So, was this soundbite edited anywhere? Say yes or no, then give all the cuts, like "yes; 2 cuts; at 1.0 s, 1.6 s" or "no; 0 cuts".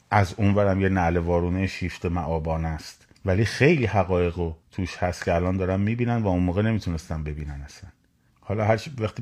yes; 3 cuts; at 3.1 s, 4.6 s, 8.3 s